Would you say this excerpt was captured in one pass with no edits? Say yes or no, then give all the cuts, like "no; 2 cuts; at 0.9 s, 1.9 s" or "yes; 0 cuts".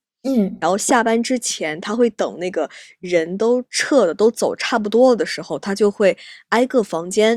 yes; 0 cuts